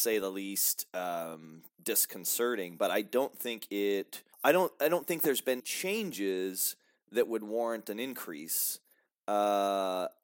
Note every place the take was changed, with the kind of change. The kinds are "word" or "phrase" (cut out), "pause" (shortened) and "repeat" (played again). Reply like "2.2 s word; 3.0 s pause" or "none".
4.3 s pause; 5.6 s word